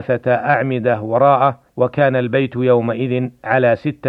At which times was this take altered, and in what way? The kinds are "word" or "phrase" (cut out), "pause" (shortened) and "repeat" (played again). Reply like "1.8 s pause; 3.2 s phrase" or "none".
1.7 s pause